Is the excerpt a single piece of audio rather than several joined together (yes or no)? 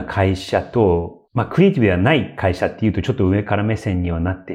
no